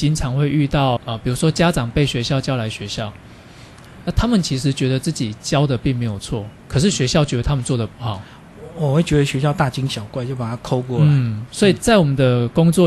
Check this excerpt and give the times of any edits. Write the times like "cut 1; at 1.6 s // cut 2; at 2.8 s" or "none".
cut 1; at 1.0 s // cut 2; at 6.6 s